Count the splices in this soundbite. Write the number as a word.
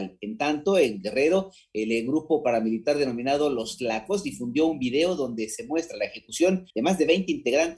one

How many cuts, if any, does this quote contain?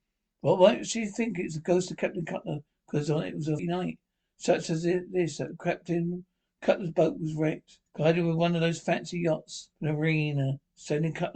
three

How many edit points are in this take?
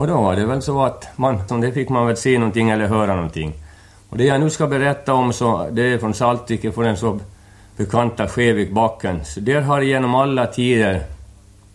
one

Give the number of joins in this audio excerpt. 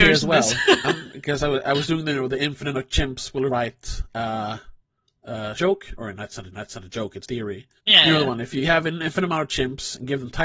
six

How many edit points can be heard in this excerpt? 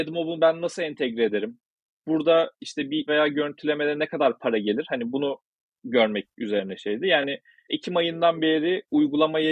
two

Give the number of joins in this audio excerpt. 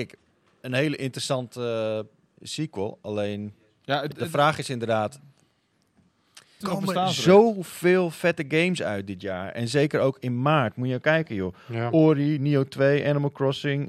two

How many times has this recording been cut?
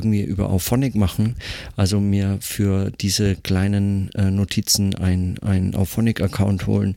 zero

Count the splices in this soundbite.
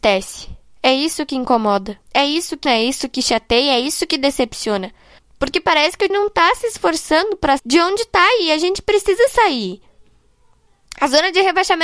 five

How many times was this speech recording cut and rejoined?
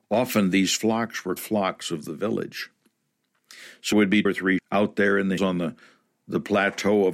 five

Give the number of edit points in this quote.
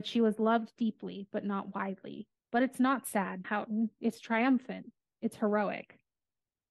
two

